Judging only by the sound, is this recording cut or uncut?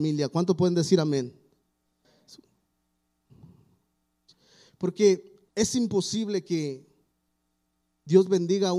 cut